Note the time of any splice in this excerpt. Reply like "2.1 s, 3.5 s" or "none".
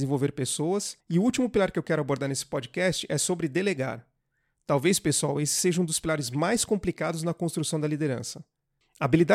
1.0 s